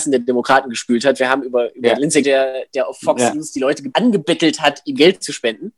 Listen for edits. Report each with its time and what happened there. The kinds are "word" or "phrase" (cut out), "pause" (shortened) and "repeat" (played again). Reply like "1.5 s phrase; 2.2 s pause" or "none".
2.2 s phrase